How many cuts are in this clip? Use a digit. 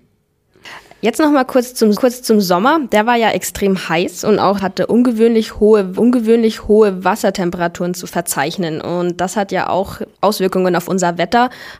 4